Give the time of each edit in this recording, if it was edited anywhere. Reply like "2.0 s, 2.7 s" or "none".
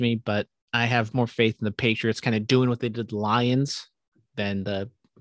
1.1 s